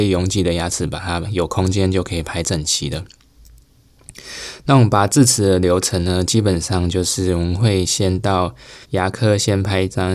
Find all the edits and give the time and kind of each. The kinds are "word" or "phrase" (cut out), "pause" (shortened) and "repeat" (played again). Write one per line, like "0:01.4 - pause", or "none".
0:08.8 - pause